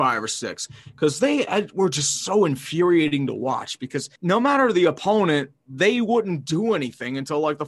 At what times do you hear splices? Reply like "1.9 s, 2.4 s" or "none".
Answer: 4.2 s